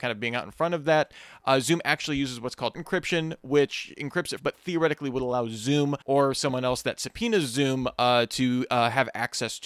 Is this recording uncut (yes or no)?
no